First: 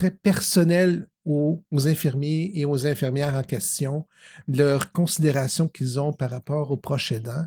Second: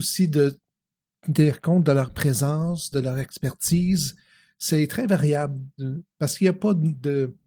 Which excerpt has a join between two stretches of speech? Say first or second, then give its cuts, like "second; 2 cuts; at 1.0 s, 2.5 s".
first; 1 cut; at 1.7 s